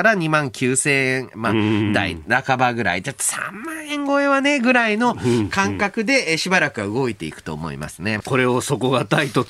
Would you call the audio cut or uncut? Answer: cut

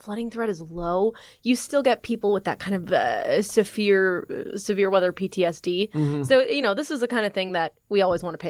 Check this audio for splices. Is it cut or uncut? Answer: uncut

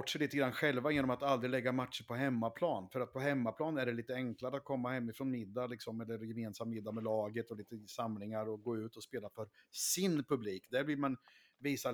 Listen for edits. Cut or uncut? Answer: uncut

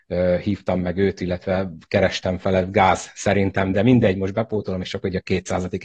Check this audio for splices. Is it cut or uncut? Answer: uncut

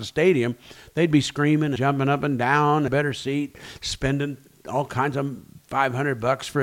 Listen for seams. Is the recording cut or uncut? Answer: cut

